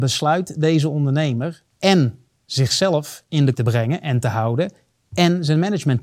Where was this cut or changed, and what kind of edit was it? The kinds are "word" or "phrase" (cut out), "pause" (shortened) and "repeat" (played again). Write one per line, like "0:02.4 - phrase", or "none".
0:01.7 - pause
0:03.5 - word